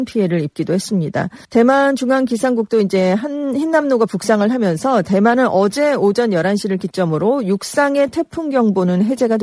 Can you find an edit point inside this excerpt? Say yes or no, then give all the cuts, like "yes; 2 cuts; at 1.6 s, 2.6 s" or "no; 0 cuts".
yes; 1 cut; at 1.4 s